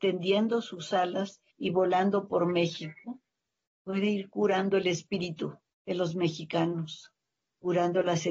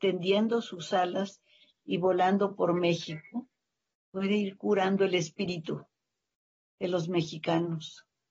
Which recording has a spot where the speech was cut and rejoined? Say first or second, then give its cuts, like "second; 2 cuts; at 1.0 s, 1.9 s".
first; 2 cuts; at 1.5 s, 5.7 s